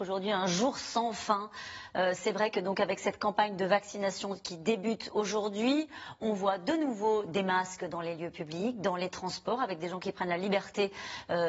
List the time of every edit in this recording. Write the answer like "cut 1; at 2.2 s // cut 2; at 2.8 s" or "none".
none